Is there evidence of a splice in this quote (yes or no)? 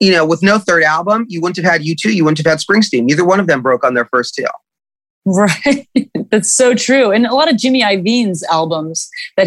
no